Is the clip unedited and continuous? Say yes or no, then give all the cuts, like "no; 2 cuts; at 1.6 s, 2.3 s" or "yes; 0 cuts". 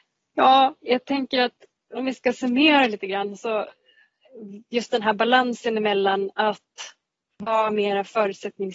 yes; 0 cuts